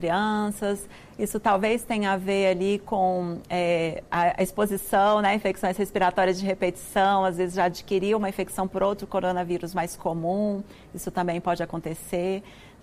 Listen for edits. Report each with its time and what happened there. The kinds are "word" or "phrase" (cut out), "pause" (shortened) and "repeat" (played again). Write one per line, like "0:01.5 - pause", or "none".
none